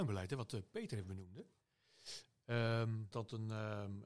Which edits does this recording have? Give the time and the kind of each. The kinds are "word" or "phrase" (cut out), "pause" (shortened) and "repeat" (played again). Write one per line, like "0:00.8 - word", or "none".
0:03.1 - word